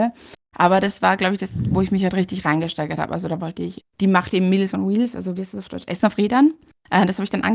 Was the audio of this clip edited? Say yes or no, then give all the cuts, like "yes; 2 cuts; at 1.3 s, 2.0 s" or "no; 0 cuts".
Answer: yes; 1 cut; at 3.8 s